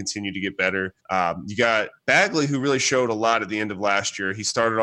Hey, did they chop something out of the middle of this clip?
yes; 2 cuts; at 1.0 s, 2.0 s

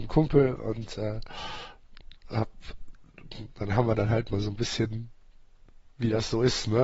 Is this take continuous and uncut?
yes; 0 cuts

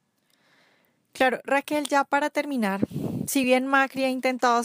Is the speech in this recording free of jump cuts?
yes; 0 cuts

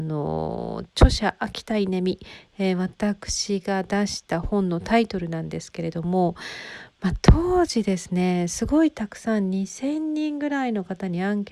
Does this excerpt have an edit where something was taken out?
no; 0 cuts

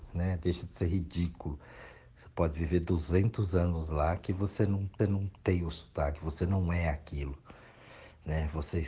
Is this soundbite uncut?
no; 1 cut; at 5.0 s

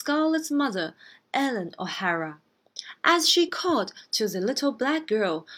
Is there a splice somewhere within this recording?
no; 0 cuts

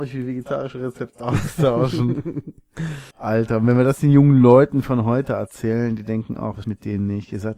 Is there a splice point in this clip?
yes; 2 cuts; at 3.1 s, 6.6 s

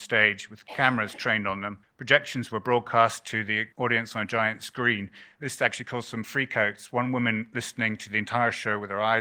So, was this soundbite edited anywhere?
yes; 2 cuts; at 1.8 s, 3.7 s

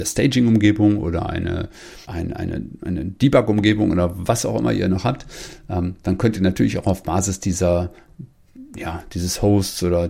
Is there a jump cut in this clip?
yes; 1 cut; at 2.0 s

